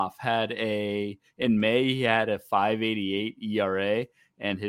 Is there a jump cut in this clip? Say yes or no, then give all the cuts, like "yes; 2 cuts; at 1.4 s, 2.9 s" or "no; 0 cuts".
no; 0 cuts